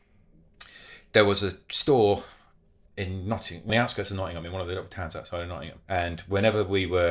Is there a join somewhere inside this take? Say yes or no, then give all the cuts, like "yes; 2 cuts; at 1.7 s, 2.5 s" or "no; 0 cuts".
yes; 3 cuts; at 2.9 s, 3.7 s, 5.8 s